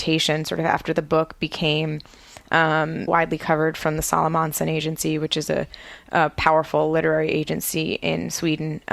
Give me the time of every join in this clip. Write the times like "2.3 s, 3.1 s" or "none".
3.1 s